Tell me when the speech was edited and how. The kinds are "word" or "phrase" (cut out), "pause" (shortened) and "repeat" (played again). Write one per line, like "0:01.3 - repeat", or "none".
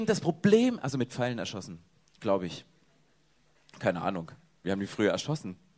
none